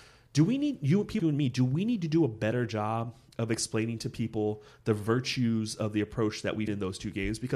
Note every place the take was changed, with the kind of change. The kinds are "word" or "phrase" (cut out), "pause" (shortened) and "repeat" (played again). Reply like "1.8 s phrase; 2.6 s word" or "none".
1.2 s word; 6.7 s word